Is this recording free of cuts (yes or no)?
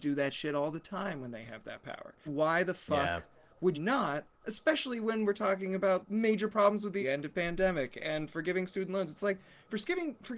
no